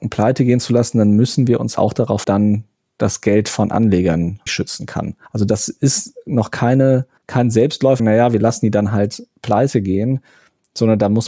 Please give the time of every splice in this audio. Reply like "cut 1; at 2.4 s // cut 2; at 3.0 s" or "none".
cut 1; at 1.8 s // cut 2; at 2.2 s // cut 3; at 4.5 s // cut 4; at 5.3 s // cut 5; at 7.2 s // cut 6; at 8.0 s

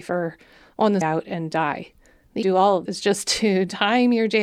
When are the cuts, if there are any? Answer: cut 1; at 1.0 s // cut 2; at 2.4 s // cut 3; at 2.8 s

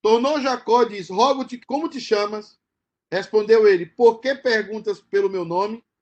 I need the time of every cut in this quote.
cut 1; at 1.6 s

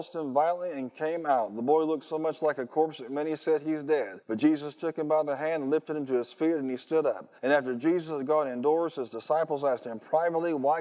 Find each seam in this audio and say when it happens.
cut 1; at 4.2 s // cut 2; at 7.4 s

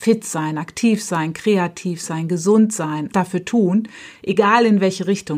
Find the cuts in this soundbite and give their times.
cut 1; at 3.1 s

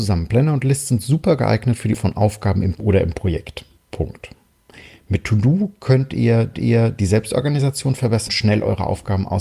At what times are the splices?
cut 1; at 1.9 s // cut 2; at 2.8 s // cut 3; at 3.8 s // cut 4; at 6.5 s // cut 5; at 8.3 s

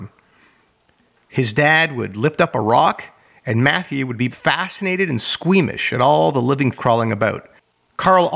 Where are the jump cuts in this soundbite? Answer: cut 1; at 4.3 s // cut 2; at 6.7 s

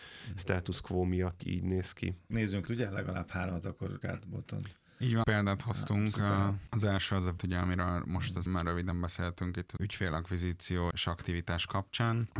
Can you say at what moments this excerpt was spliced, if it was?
cut 1; at 1.4 s // cut 2; at 2.7 s // cut 3; at 4.0 s // cut 4; at 5.2 s // cut 5; at 7.4 s // cut 6; at 8.5 s // cut 7; at 9.8 s // cut 8; at 10.9 s

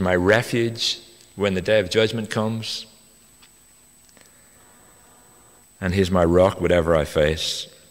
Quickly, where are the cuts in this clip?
none

